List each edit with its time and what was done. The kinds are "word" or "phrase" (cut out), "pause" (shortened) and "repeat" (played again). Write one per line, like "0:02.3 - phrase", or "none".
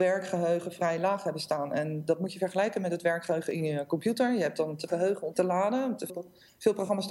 0:04.9 - word
0:05.3 - word
0:06.1 - word